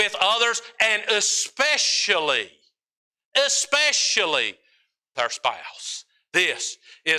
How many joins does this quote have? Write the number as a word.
one